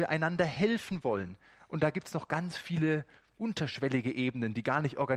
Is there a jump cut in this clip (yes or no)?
no